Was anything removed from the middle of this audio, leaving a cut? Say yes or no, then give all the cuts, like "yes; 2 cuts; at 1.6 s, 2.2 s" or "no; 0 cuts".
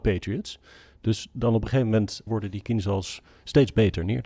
no; 0 cuts